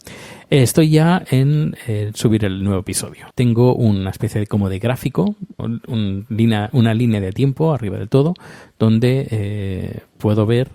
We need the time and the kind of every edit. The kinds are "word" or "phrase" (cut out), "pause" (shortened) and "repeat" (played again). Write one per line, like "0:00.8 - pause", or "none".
0:03.3 - pause
0:05.6 - word

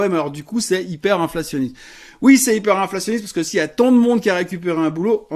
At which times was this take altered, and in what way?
none

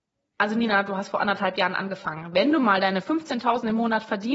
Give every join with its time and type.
none

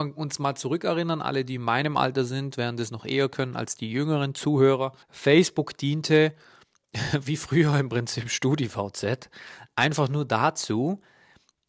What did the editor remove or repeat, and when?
0:05.0 - pause

